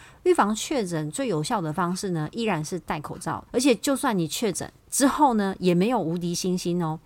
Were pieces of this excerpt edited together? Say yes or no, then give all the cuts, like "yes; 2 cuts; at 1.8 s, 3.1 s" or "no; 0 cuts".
yes; 2 cuts; at 3.5 s, 4.8 s